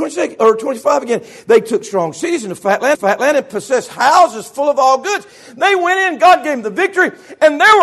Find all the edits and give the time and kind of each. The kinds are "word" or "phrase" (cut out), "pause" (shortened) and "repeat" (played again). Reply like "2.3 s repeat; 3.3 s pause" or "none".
2.9 s repeat